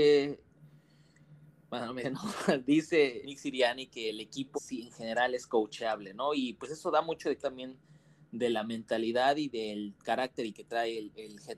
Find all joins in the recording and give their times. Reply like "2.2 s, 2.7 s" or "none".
2.0 s, 3.2 s, 4.5 s, 7.4 s, 10.5 s